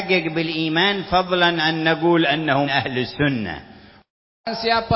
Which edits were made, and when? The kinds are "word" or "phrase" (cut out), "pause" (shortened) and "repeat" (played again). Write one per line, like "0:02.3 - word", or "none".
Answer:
0:01.6 - word
0:02.7 - word